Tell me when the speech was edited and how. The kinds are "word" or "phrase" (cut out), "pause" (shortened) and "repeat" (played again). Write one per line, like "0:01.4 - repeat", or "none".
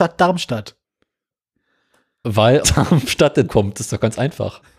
0:02.6 - word
0:03.5 - word